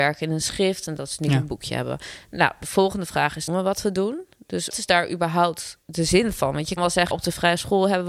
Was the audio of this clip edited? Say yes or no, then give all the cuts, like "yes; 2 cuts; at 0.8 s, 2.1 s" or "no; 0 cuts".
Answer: yes; 5 cuts; at 3.5 s, 4.7 s, 5.8 s, 6.8 s, 7.1 s